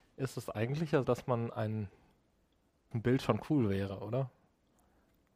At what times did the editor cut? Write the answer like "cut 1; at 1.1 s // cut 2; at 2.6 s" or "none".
cut 1; at 1.0 s // cut 2; at 2.9 s